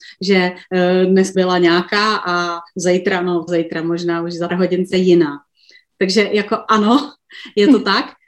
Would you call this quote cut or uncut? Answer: cut